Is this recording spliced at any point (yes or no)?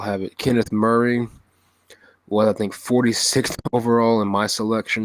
no